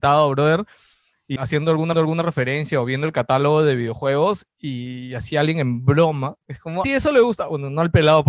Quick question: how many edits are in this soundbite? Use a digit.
4